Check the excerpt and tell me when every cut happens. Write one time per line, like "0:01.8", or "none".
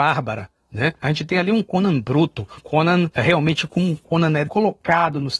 0:01.0
0:02.6